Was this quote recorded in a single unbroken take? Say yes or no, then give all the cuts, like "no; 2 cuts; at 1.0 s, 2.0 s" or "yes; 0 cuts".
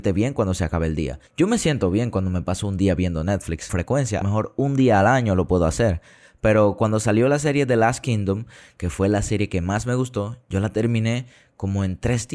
no; 3 cuts; at 1.3 s, 3.7 s, 4.2 s